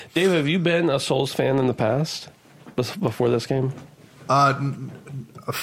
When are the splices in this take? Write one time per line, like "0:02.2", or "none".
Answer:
none